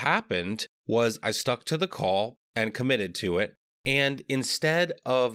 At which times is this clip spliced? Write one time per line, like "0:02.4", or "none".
none